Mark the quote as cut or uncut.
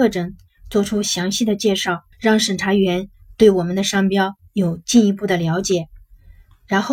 cut